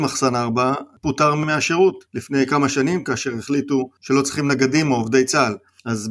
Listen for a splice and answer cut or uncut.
uncut